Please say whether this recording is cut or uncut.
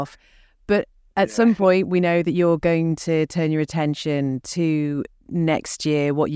uncut